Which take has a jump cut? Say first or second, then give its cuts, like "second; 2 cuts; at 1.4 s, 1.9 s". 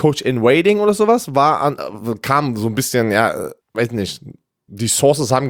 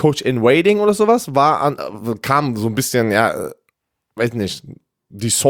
first; 1 cut; at 3.6 s